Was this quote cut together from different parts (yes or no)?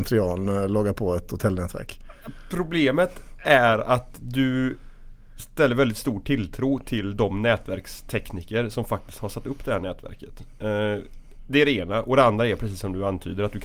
no